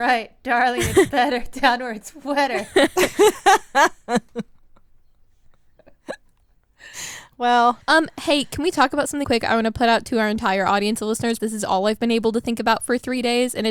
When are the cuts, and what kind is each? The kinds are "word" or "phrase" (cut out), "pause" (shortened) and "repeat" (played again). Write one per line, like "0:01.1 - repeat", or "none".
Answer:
0:07.3 - word
0:07.8 - pause
0:09.2 - word
0:11.4 - word